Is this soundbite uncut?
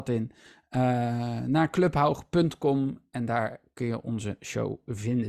yes; 0 cuts

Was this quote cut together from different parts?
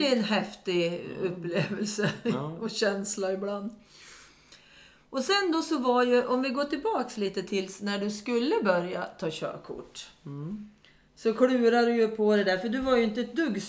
no; 0 cuts

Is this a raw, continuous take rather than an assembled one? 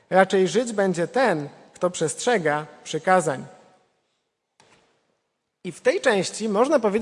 yes; 0 cuts

